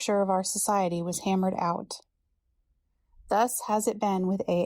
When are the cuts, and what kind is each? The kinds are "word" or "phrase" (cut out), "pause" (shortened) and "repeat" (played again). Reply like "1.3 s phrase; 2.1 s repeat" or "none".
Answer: none